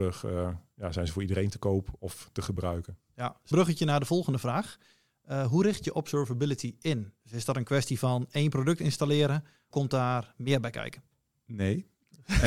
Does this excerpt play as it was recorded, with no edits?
no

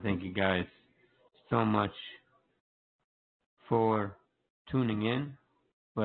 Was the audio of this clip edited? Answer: no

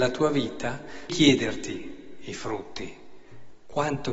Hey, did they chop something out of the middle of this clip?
yes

